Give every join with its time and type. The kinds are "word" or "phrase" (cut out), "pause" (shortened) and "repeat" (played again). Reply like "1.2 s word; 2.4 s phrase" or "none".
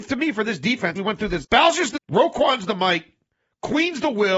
0.9 s word; 1.4 s word; 1.9 s word